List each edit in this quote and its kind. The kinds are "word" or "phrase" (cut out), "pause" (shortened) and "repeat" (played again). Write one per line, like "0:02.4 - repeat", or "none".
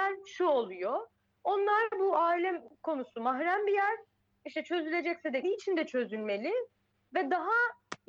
0:05.4 - word